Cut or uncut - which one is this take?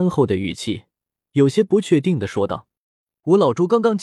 uncut